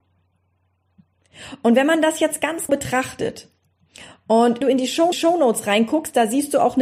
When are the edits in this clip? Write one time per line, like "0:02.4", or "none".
0:02.7
0:04.6
0:05.1